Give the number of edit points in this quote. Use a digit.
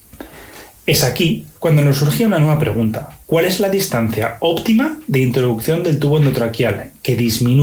2